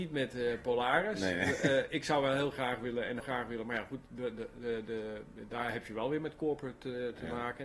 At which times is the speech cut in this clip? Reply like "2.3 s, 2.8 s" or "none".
3.2 s